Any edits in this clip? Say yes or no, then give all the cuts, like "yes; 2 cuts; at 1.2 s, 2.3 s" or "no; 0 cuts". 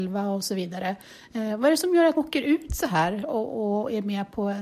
yes; 1 cut; at 2.2 s